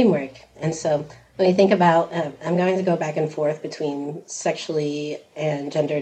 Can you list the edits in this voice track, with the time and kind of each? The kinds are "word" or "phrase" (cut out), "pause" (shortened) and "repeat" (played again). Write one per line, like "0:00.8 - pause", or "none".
none